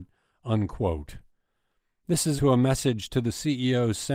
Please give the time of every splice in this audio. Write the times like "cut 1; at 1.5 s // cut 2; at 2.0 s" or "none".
cut 1; at 2.4 s